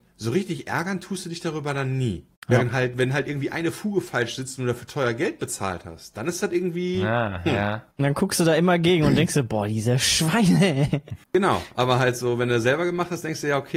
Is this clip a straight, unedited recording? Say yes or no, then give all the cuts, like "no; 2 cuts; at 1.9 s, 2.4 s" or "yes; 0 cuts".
no; 3 cuts; at 2.4 s, 7.9 s, 11.2 s